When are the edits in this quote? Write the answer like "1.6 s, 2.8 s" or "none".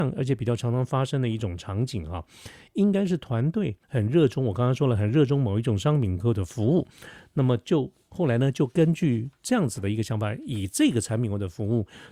3.8 s